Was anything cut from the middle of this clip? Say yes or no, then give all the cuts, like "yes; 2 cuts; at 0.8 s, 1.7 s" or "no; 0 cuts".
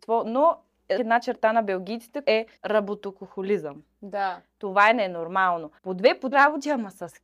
yes; 5 cuts; at 1.0 s, 2.2 s, 2.6 s, 5.8 s, 6.3 s